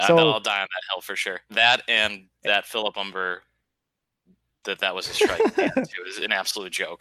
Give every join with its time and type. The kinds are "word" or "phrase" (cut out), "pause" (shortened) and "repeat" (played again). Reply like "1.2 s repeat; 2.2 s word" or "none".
none